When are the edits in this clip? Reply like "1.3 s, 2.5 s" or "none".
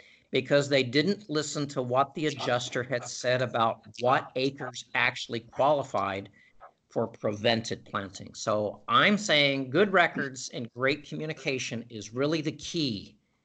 none